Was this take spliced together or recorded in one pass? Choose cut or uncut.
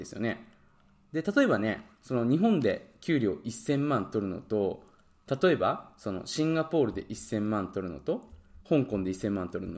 cut